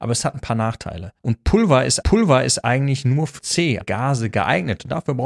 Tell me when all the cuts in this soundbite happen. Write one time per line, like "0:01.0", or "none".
0:01.2
0:02.0
0:03.4
0:03.8